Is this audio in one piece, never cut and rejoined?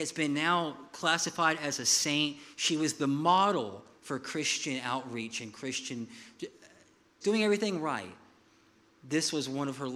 no; 1 cut; at 7.2 s

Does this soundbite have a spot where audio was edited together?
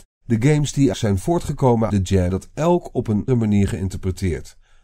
yes; 4 cuts; at 0.9 s, 1.9 s, 2.3 s, 3.3 s

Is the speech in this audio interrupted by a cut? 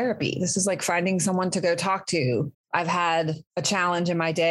yes; 1 cut; at 2.5 s

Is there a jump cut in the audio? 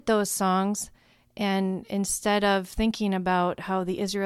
no; 0 cuts

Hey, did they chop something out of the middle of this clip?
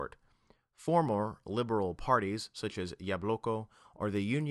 no; 0 cuts

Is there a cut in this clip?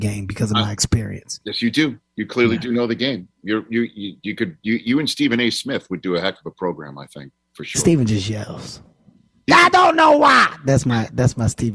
no; 0 cuts

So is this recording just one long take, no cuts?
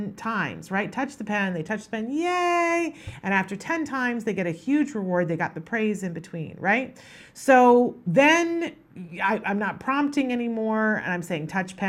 yes; 0 cuts

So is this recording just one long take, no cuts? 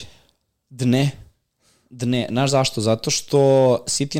yes; 0 cuts

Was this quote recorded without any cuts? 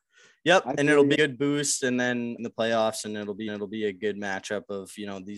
no; 3 cuts; at 1.1 s, 2.4 s, 3.5 s

